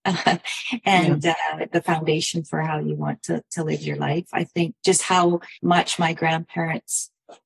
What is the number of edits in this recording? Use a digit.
1